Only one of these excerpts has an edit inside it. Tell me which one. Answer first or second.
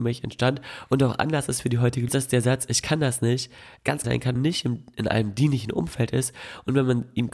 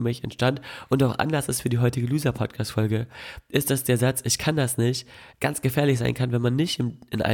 first